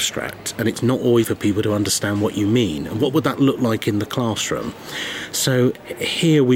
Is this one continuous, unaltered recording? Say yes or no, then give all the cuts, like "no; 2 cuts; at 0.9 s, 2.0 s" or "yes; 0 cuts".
no; 1 cut; at 1.2 s